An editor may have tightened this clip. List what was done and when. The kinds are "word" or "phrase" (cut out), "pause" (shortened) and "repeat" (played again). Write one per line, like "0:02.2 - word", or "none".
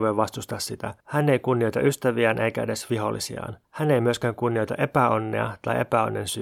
0:01.0 - pause
0:03.6 - pause